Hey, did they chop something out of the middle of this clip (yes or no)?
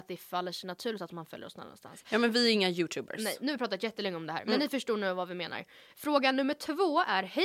no